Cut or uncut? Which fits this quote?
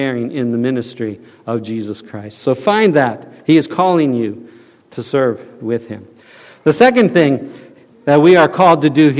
uncut